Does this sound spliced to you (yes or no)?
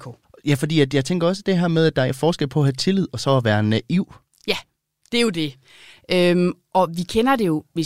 no